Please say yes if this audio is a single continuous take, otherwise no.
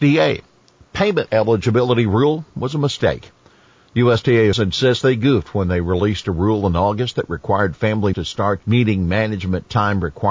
no